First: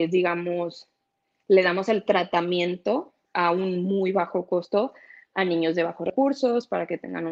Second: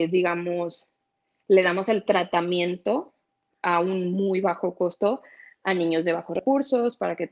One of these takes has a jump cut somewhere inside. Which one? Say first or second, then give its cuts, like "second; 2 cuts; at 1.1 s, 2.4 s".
first; 1 cut; at 3.2 s